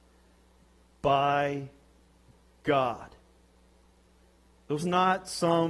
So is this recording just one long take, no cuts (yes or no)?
no